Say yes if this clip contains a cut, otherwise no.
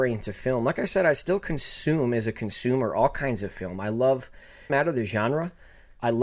yes